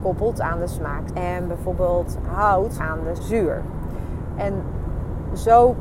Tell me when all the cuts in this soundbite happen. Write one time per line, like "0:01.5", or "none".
0:01.1
0:02.8
0:03.2